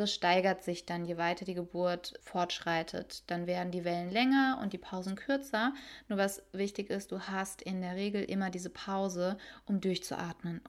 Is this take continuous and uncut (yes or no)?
no